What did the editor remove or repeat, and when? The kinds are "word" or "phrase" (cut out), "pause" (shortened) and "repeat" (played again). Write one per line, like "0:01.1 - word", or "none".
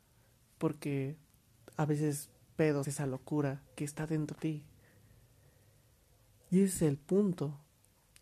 0:02.8 - word
0:04.3 - word